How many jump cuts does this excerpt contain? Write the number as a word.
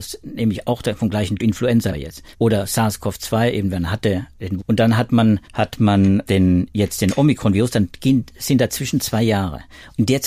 six